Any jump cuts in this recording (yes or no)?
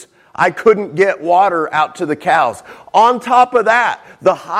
no